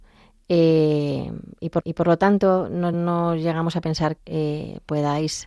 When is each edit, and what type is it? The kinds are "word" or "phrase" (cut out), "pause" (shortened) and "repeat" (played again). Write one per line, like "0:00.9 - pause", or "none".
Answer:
0:01.8 - repeat
0:02.9 - word
0:04.2 - word